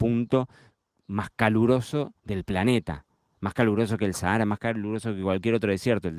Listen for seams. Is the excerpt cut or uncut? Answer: cut